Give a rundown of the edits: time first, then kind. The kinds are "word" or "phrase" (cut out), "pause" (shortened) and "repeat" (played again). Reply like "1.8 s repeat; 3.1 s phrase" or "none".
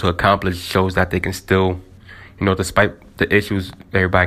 none